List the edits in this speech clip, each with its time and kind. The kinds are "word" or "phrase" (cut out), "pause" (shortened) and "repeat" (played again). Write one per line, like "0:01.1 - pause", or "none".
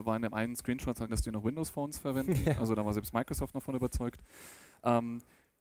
0:01.1 - word